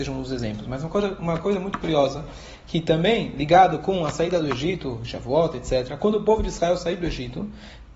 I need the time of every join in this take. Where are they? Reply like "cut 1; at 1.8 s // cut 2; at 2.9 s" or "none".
none